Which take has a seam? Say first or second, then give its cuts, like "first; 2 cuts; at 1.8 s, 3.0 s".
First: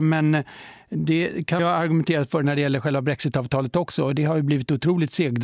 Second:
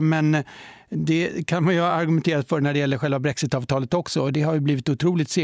first; 1 cut; at 1.6 s